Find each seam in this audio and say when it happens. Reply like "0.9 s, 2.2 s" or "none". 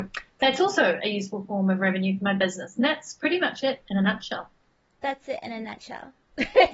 none